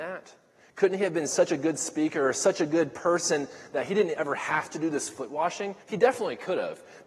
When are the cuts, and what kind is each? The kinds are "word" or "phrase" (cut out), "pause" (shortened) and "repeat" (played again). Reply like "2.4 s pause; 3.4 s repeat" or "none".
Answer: 5.8 s pause